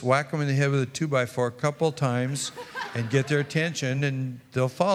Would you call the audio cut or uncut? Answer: uncut